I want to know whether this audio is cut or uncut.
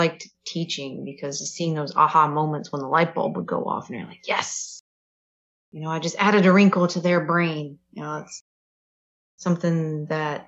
uncut